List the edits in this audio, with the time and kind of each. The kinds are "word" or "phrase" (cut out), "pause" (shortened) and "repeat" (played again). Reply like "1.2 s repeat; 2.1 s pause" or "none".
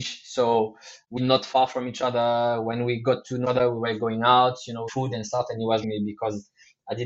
1.2 s word; 3.4 s word; 4.9 s phrase; 5.8 s word